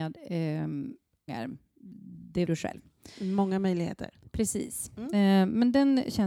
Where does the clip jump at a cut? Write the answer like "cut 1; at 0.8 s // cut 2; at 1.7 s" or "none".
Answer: cut 1; at 1.3 s // cut 2; at 2.5 s